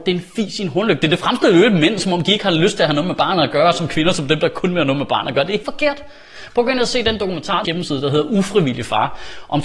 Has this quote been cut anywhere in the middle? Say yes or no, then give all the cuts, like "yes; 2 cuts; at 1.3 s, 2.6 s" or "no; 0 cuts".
yes; 2 cuts; at 5.6 s, 7.6 s